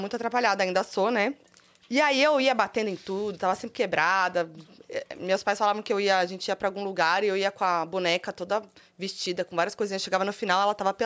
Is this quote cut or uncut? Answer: uncut